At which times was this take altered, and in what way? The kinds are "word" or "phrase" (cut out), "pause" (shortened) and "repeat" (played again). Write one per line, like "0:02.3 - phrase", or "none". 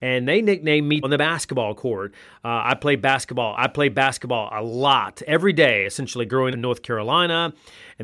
0:01.0 - word
0:03.6 - repeat
0:06.5 - word

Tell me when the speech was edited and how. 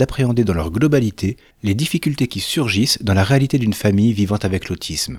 none

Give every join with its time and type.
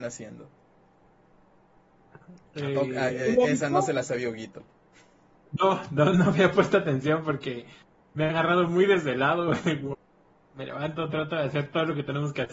none

